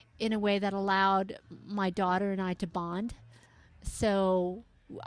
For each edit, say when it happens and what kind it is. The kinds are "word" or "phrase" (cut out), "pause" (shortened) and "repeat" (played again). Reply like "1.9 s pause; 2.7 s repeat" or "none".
none